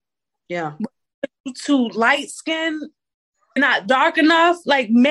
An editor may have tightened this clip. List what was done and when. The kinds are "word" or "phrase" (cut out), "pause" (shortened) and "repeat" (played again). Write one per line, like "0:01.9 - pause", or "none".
0:03.6 - word